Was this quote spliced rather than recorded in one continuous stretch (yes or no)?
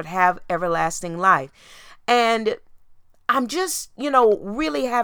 no